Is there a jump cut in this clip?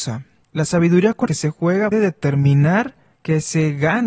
yes; 2 cuts; at 1.3 s, 1.9 s

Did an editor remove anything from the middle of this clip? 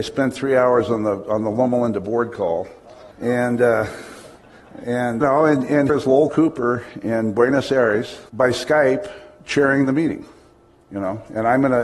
yes; 4 cuts; at 3.1 s, 5.2 s, 5.9 s, 8.3 s

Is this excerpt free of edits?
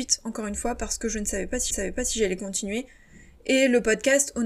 no; 1 cut; at 1.7 s

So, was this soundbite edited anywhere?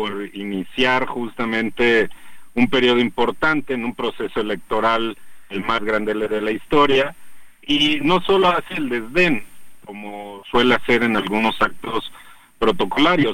no; 0 cuts

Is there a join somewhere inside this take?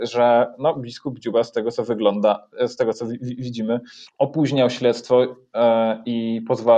no; 0 cuts

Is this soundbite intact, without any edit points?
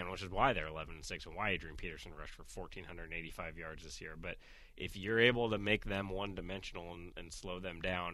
yes; 0 cuts

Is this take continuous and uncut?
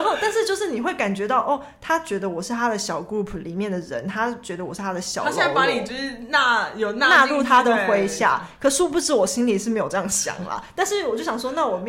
yes; 0 cuts

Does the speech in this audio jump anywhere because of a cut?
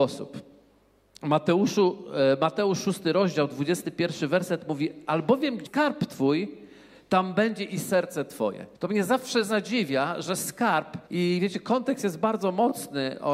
yes; 3 cuts; at 5.7 s, 8.7 s, 11.1 s

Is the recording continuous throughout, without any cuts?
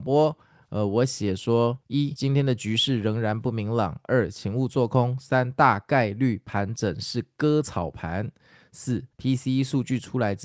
no; 2 cuts; at 1.8 s, 9.1 s

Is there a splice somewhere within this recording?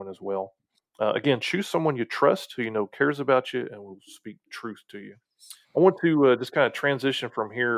yes; 1 cut; at 5.6 s

